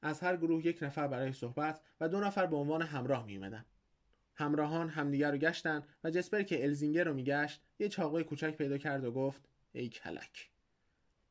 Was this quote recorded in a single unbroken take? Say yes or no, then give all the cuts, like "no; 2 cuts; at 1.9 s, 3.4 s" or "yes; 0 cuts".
yes; 0 cuts